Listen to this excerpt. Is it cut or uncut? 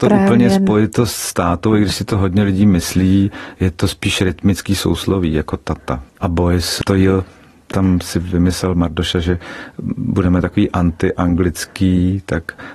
cut